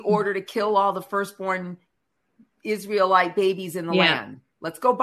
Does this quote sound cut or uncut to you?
uncut